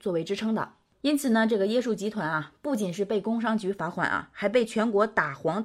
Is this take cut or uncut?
uncut